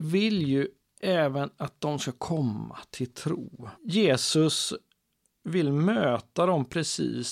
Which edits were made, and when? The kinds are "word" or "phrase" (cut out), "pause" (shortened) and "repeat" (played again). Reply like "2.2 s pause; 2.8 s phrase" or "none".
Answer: 3.8 s pause